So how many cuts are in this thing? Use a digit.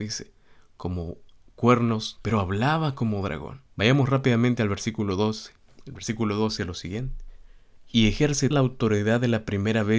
4